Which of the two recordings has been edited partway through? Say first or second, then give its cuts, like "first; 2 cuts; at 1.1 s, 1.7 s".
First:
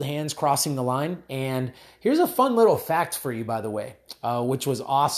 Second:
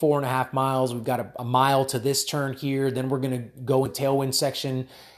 second; 2 cuts; at 1.4 s, 3.9 s